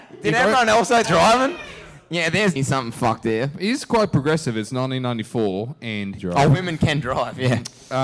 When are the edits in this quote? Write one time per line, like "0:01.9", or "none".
0:01.0
0:02.6
0:06.2